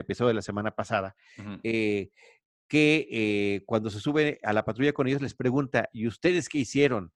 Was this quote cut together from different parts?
no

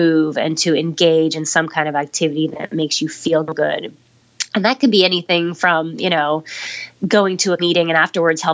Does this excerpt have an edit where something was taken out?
yes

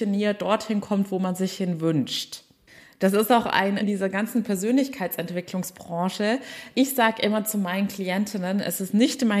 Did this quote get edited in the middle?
yes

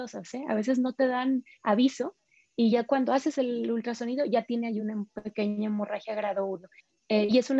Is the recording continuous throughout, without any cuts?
yes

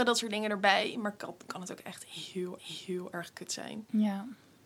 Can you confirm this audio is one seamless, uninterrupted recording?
no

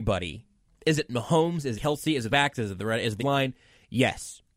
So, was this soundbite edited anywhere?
yes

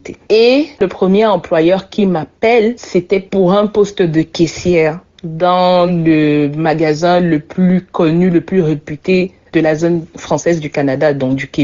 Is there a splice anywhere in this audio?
no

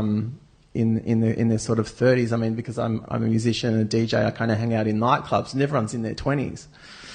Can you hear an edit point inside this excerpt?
yes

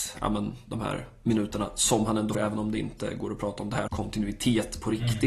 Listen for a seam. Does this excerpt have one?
yes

